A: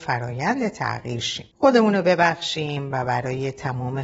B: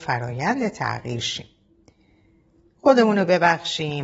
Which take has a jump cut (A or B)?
A